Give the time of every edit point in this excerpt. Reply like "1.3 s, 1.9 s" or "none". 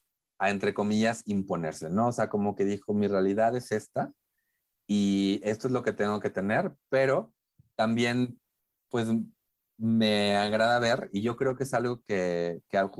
none